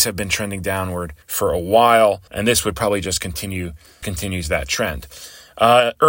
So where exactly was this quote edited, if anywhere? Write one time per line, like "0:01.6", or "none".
0:01.2
0:02.3
0:04.0